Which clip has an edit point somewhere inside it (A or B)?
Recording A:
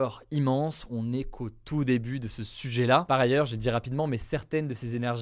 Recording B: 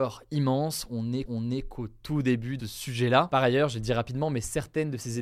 B